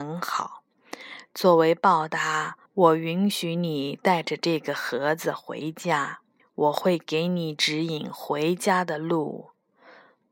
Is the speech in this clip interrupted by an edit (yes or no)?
yes